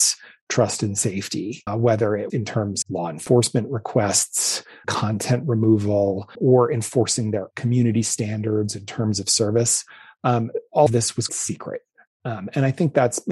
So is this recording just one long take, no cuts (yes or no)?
no